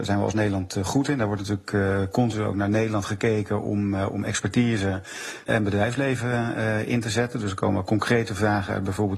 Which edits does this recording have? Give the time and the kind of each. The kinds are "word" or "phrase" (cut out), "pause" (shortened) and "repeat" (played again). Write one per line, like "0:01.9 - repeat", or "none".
0:05.5 - word